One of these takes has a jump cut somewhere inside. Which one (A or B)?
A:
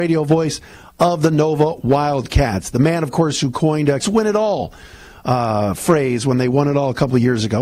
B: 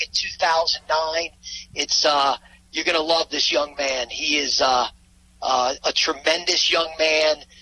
A